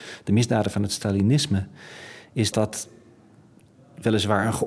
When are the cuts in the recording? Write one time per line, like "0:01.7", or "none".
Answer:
0:02.5